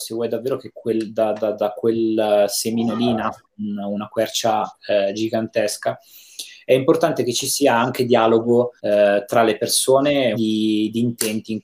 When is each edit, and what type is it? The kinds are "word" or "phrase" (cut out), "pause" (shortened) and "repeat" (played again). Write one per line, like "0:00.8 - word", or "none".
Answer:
0:03.4 - pause
0:08.8 - pause
0:10.3 - phrase